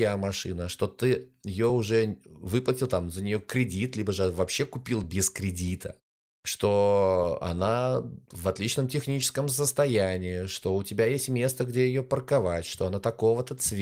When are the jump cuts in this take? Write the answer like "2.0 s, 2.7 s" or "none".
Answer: none